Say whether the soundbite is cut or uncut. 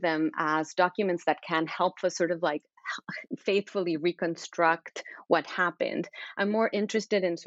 cut